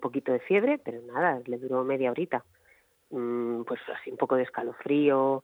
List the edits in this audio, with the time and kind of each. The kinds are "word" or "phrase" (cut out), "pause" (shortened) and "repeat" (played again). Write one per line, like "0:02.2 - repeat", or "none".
none

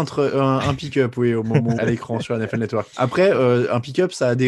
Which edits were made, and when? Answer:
0:01.8 - word
0:02.9 - pause

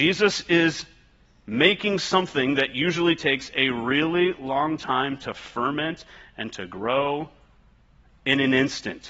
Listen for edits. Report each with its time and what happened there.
none

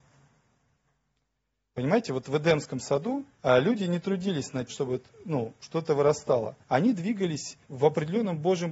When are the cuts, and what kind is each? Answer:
0:03.3 - pause
0:04.7 - word
0:06.6 - pause
0:07.6 - pause

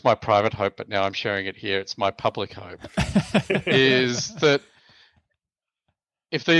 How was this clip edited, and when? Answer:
none

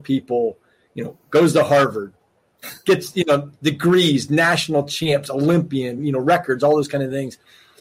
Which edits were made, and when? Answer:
none

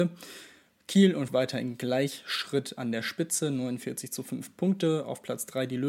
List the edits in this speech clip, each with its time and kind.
0:01.3 - word

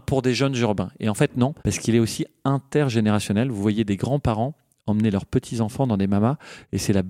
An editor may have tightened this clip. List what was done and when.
0:01.6 - pause

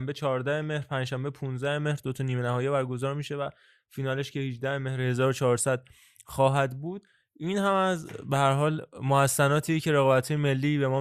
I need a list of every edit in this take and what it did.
none

